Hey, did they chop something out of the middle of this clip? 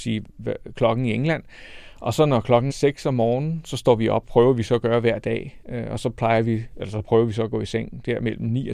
yes; 2 cuts; at 2.7 s, 4.2 s

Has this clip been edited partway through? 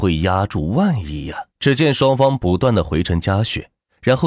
yes; 1 cut; at 1.5 s

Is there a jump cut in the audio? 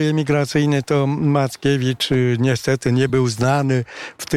no; 0 cuts

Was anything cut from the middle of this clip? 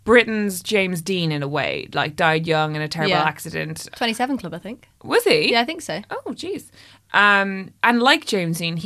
no; 0 cuts

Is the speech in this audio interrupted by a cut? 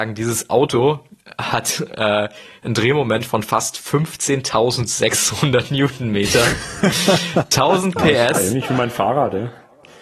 no; 0 cuts

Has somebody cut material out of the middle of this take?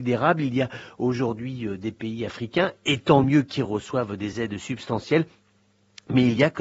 no; 0 cuts

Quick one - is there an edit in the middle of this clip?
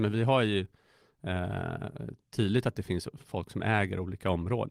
no; 0 cuts

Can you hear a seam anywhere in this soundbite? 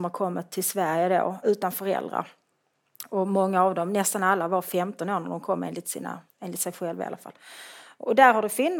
yes; 2 cuts; at 1.4 s, 6.3 s

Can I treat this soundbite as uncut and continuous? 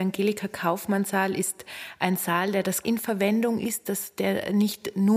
no; 1 cut; at 2.8 s

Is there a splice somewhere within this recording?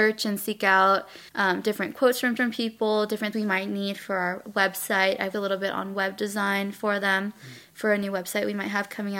yes; 4 cuts; at 1.3 s, 2.4 s, 3.3 s, 5.3 s

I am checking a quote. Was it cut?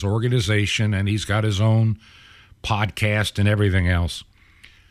no; 0 cuts

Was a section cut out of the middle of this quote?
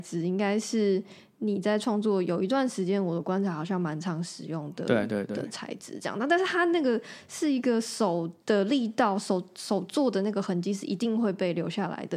yes; 1 cut; at 8.4 s

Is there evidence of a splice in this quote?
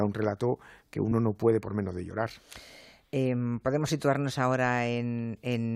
no; 0 cuts

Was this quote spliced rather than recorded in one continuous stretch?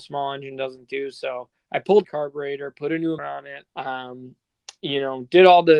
yes; 3 cuts; at 2.0 s, 3.2 s, 3.7 s

